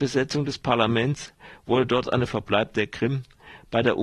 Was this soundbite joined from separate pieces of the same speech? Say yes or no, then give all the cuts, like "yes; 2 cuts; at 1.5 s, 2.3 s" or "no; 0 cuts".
yes; 1 cut; at 2.3 s